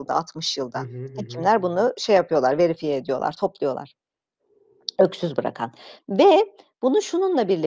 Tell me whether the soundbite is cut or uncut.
uncut